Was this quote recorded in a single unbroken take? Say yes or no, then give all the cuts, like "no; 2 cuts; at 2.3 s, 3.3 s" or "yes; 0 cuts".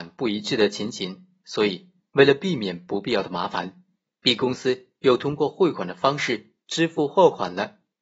yes; 0 cuts